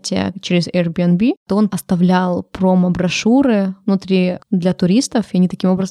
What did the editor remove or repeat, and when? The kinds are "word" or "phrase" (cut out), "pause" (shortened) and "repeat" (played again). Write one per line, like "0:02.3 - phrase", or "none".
0:01.7 - word
0:04.4 - word